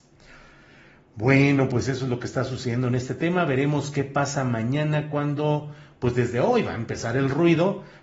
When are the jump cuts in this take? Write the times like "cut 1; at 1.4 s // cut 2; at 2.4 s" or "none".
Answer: none